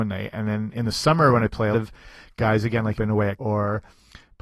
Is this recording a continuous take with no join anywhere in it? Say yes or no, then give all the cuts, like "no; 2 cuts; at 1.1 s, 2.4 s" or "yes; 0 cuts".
no; 3 cuts; at 1.7 s, 3.0 s, 3.4 s